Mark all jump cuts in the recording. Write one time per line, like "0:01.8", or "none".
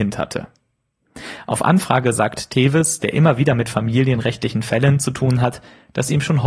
none